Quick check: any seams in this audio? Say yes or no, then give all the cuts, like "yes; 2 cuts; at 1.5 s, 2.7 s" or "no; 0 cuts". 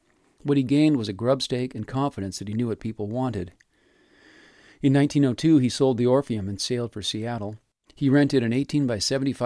no; 0 cuts